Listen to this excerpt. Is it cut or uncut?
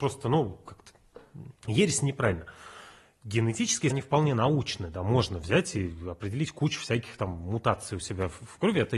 cut